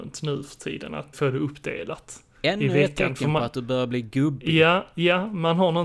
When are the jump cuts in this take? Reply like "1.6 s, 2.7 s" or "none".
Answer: 1.1 s